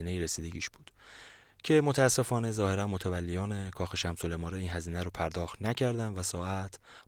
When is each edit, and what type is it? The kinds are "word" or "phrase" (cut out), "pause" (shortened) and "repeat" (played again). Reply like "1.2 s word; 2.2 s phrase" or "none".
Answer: none